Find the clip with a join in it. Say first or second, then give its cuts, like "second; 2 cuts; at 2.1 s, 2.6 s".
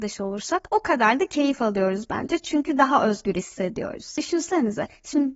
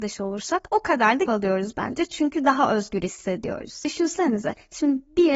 second; 1 cut; at 1.3 s